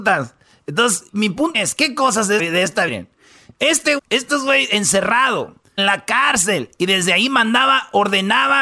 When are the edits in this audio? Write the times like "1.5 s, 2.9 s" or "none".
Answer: 1.1 s, 1.5 s, 2.4 s, 2.9 s, 4.0 s, 5.8 s